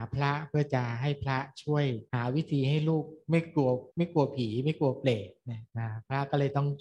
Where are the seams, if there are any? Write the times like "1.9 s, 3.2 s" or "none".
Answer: 2.1 s, 3.2 s, 3.9 s, 5.7 s